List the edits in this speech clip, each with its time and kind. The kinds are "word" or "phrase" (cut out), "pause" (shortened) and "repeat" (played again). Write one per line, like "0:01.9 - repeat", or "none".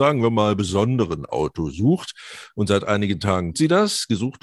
0:03.5 - word